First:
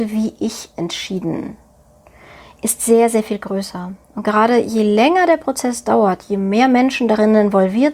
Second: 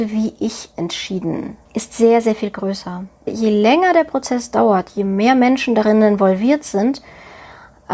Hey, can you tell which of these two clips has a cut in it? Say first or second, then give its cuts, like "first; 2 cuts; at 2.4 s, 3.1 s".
second; 2 cuts; at 1.7 s, 3.3 s